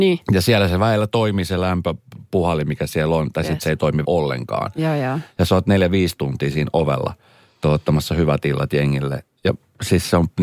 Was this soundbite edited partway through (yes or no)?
yes